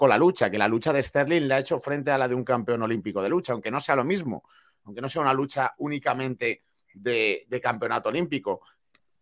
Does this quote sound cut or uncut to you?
uncut